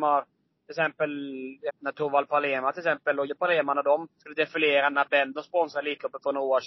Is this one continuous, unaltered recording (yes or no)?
no